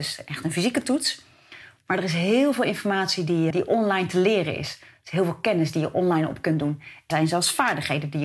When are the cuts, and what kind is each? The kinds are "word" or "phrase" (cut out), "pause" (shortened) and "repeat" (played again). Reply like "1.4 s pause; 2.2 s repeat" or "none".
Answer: 3.5 s word; 7.1 s word